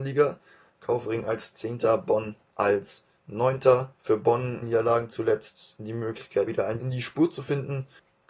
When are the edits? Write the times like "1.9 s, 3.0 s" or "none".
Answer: 2.4 s, 4.0 s, 4.6 s, 5.8 s, 6.5 s, 6.8 s